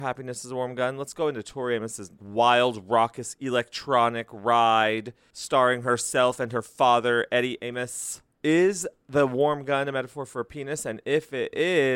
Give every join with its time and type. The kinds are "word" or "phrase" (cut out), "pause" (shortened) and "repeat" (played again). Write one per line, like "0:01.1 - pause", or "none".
0:02.2 - word